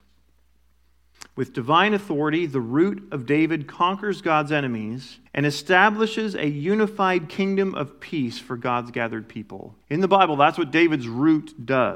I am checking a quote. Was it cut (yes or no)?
yes